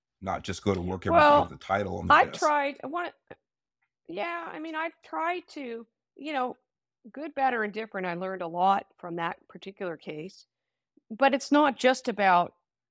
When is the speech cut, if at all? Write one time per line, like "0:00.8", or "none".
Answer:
none